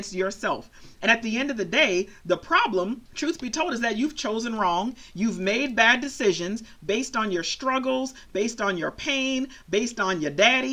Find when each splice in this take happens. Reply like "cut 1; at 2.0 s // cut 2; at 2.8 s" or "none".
cut 1; at 3.1 s